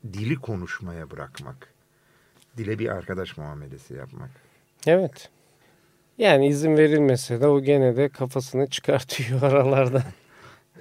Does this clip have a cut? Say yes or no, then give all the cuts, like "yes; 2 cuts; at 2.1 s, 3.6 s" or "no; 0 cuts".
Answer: yes; 1 cut; at 5.6 s